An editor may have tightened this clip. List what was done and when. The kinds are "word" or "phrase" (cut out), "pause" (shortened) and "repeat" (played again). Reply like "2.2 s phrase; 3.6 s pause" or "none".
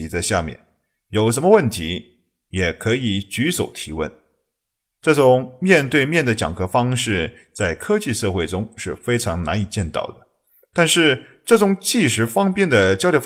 none